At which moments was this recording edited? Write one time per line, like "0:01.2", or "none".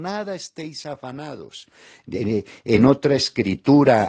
none